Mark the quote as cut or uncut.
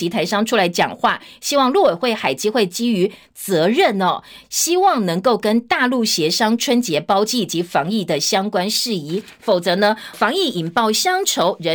cut